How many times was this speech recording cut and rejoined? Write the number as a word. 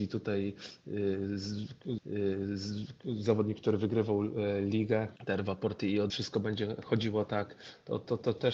three